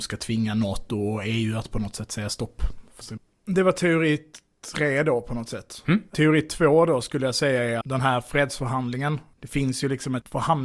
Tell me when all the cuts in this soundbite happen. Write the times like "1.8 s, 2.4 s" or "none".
3.0 s, 7.8 s